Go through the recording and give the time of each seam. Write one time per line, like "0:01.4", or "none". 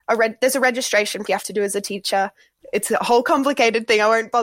0:01.3

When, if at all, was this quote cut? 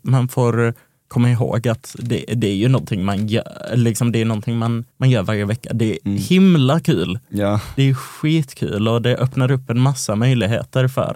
0:04.9

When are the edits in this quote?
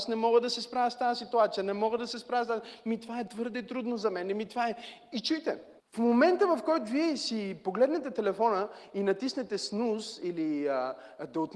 0:05.8

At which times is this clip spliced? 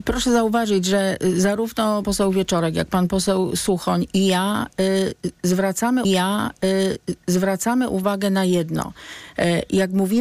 0:02.0
0:06.0

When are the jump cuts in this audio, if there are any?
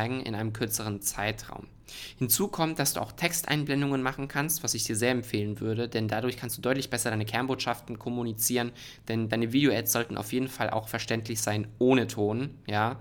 none

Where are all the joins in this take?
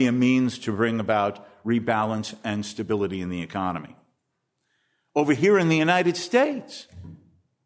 none

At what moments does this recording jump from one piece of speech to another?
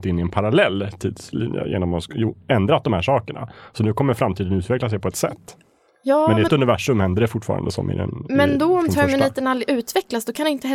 0:05.1
0:06.5

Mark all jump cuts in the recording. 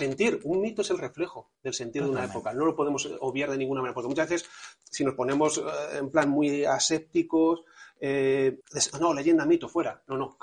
0:01.5
0:08.6

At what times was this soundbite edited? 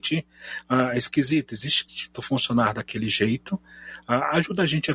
0:01.9

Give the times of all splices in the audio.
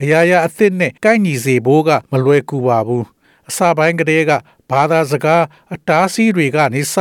0:01.0
0:02.0
0:03.2

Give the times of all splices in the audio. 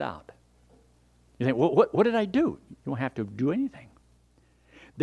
0:02.8

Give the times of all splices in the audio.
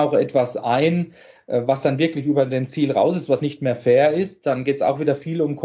0:03.4

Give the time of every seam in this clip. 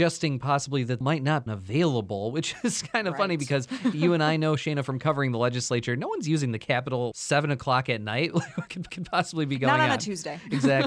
0:01.0
0:01.5
0:07.1
0:08.9

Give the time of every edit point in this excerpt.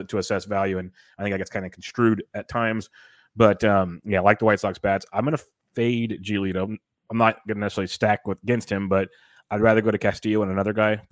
none

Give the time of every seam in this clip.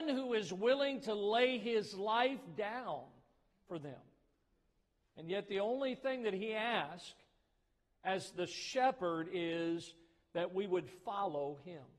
none

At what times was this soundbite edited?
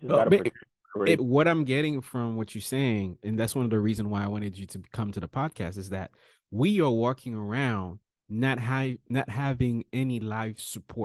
0:01.2

